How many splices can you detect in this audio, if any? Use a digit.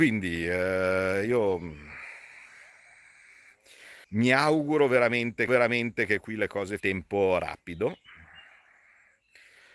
3